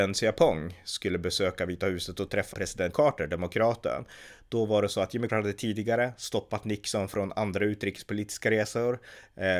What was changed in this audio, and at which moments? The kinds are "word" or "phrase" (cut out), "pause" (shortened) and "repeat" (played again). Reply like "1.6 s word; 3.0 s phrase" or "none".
2.5 s word; 2.9 s word; 5.3 s word